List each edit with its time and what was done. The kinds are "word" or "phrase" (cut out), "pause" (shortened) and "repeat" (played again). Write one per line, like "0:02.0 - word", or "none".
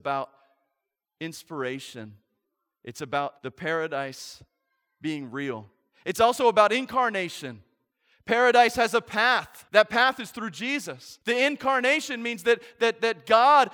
0:03.4 - pause
0:09.7 - pause
0:11.2 - pause